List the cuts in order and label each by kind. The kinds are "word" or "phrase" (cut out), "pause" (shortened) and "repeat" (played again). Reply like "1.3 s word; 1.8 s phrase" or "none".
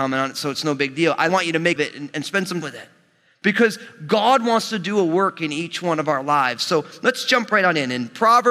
1.3 s word; 1.8 s phrase; 2.6 s word